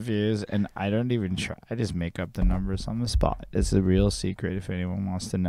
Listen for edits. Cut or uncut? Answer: uncut